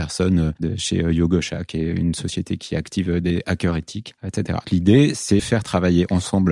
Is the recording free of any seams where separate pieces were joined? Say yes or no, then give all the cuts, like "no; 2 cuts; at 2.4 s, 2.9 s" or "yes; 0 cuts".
no; 2 cuts; at 4.6 s, 5.4 s